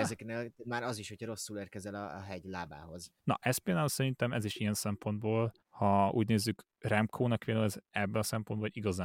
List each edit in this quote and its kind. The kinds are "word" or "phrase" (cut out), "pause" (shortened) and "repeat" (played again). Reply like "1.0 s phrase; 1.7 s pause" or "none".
3.2 s pause; 5.6 s pause